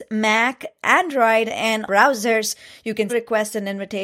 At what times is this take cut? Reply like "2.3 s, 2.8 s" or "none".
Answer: 1.9 s, 3.1 s